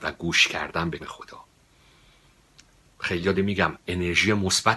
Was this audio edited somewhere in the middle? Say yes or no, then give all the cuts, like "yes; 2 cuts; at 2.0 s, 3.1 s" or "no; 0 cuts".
yes; 2 cuts; at 1.0 s, 3.3 s